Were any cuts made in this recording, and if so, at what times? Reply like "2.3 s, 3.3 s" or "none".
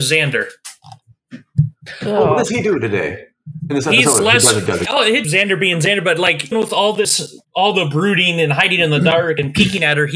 4.9 s, 5.2 s, 6.5 s, 7.4 s